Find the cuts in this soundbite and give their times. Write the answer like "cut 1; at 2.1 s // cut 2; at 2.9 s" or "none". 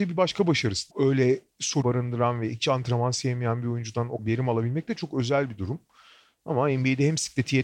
cut 1; at 0.9 s // cut 2; at 1.8 s // cut 3; at 4.2 s